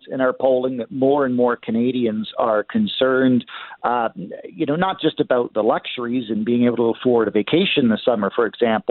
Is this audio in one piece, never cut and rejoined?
yes; 0 cuts

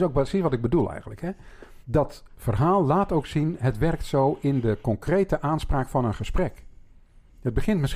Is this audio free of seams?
no; 1 cut; at 1.8 s

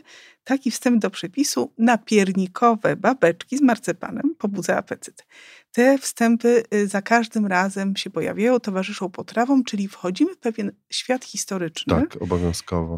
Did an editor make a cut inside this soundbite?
no; 0 cuts

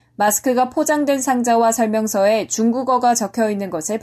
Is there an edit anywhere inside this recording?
no; 0 cuts

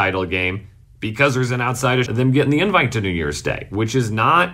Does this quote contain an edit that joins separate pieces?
yes; 1 cut; at 2.1 s

